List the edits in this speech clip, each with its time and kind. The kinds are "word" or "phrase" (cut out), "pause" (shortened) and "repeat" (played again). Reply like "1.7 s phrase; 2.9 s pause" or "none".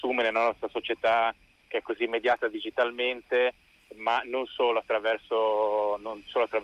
none